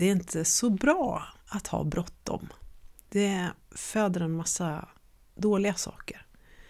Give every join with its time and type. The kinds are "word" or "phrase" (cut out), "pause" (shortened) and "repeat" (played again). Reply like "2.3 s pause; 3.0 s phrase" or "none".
none